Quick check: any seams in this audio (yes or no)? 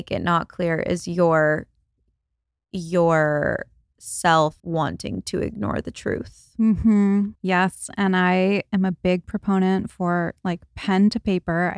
yes